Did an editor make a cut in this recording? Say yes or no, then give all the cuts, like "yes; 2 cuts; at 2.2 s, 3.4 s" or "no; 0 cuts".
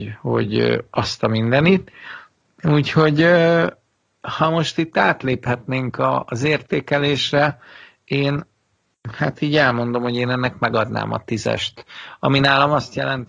no; 0 cuts